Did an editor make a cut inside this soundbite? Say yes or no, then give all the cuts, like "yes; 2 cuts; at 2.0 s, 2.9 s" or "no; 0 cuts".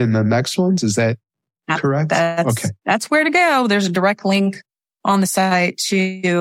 no; 0 cuts